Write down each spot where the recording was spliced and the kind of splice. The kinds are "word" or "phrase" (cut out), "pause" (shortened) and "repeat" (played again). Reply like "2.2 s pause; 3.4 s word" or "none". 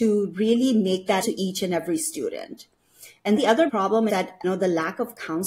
1.2 s word; 3.4 s word; 3.7 s word; 4.1 s word; 4.4 s word